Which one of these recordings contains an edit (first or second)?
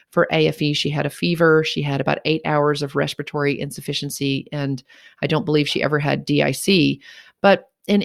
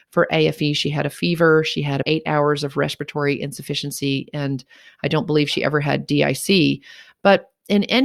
second